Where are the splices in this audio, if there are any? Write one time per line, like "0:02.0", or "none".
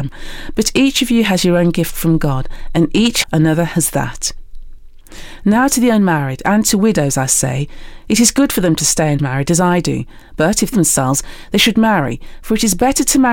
0:03.2
0:10.7